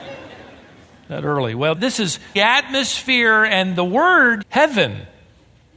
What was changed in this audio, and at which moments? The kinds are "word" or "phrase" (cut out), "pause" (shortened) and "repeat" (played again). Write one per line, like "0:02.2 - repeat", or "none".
0:01.7 - word
0:02.4 - phrase
0:04.4 - phrase